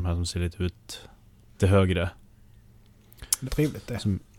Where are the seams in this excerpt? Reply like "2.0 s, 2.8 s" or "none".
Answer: 1.6 s, 3.4 s